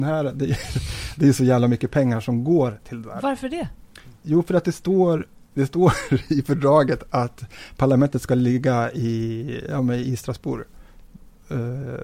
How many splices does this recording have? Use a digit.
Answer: 0